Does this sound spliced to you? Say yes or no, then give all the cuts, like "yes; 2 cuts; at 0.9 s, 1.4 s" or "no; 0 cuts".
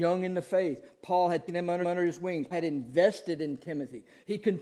yes; 3 cuts; at 1.5 s, 1.8 s, 2.5 s